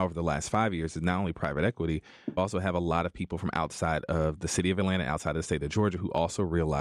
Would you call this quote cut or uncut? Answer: cut